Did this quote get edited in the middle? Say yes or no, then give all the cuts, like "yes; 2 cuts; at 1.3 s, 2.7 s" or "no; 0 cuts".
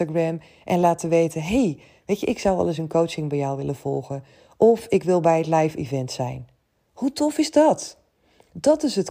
no; 0 cuts